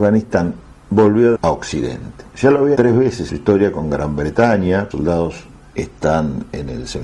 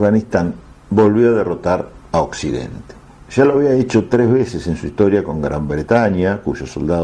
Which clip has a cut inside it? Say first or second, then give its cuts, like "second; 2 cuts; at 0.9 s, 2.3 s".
first; 5 cuts; at 1.3 s, 2.3 s, 2.7 s, 3.3 s, 4.9 s